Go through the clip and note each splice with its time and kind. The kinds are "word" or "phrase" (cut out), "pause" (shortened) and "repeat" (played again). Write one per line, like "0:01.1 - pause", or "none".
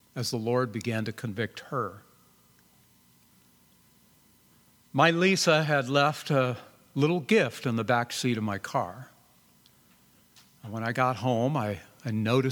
none

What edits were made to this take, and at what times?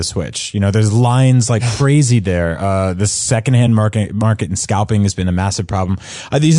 none

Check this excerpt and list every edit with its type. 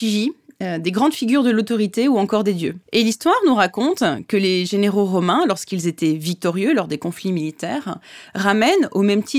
0:02.8 - pause

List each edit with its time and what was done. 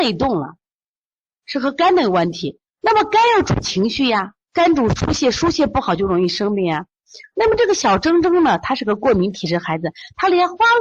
0:01.2 - pause
0:04.4 - pause

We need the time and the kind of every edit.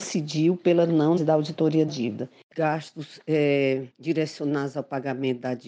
0:01.2 - word
0:01.9 - word
0:02.5 - phrase
0:03.9 - pause

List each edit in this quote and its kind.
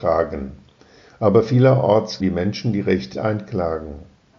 0:02.2 - word
0:03.1 - word

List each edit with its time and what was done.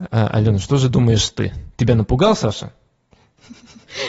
0:01.7 - pause

